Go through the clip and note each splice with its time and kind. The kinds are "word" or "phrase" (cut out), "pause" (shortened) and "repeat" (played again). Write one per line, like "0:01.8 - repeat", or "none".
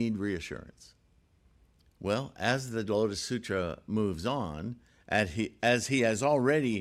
none